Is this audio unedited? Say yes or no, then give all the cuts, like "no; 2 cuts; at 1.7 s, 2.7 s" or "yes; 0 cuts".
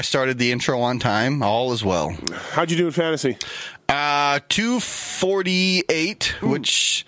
yes; 0 cuts